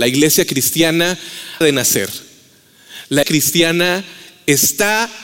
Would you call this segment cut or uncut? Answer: cut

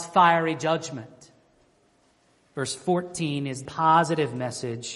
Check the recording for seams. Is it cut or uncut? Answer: cut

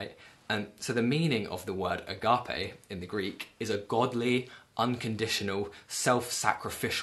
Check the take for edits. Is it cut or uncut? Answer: uncut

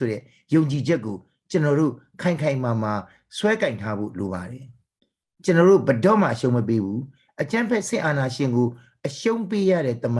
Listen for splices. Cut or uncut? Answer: uncut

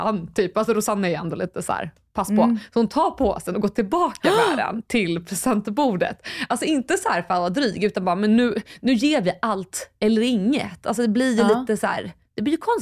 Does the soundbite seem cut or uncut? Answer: uncut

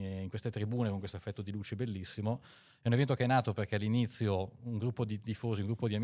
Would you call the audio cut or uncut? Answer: uncut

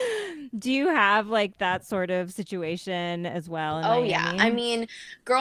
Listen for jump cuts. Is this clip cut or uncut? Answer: uncut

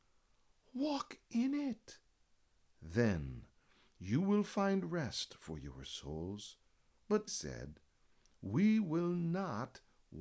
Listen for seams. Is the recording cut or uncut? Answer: cut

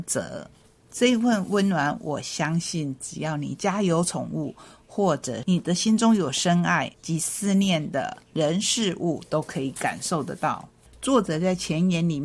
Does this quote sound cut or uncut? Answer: uncut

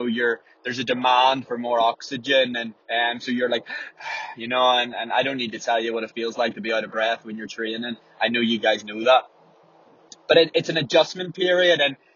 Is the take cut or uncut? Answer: cut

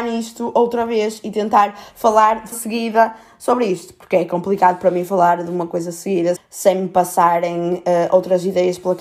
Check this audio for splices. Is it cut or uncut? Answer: cut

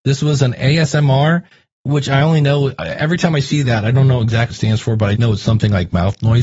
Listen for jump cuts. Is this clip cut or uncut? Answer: cut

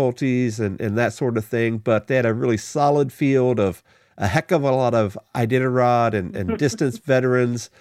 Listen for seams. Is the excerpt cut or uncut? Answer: uncut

